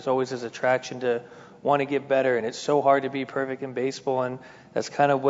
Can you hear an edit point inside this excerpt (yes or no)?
no